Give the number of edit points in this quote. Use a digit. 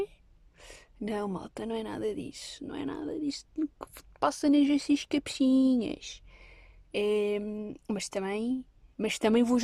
0